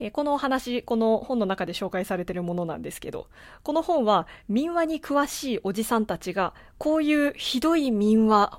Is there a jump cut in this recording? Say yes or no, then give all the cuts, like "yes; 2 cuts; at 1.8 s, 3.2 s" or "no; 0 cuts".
no; 0 cuts